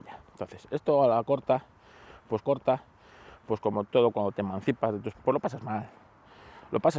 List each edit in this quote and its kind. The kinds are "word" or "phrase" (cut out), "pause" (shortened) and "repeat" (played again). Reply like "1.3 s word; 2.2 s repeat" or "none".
2.4 s repeat; 5.1 s word

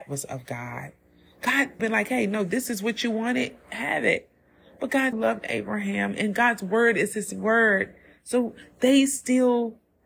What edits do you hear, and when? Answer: 1.8 s phrase; 5.1 s word

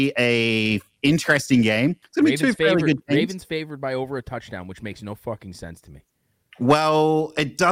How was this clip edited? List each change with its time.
2.0 s pause

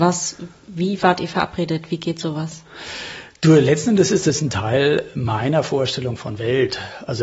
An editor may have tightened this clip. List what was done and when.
none

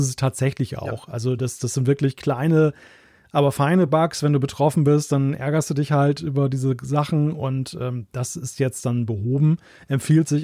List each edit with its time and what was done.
none

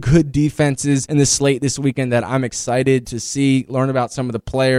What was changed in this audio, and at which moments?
none

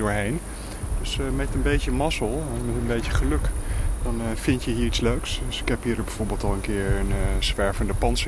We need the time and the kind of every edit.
none

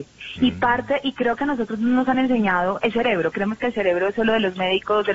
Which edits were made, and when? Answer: none

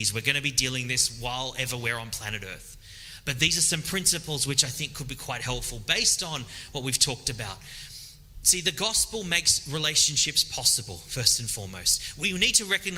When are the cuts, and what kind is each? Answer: none

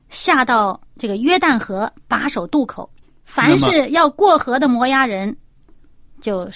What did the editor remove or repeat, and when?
3.0 s pause

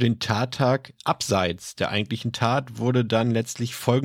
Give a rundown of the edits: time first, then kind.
none

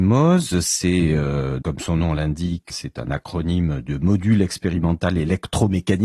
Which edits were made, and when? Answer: 1.6 s word; 2.7 s word

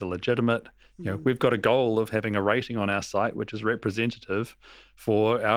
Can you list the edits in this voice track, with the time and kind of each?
none

